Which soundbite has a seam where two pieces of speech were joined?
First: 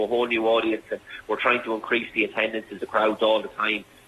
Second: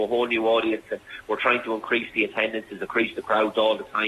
first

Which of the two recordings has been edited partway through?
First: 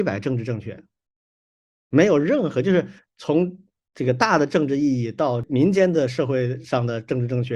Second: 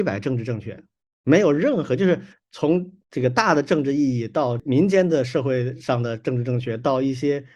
second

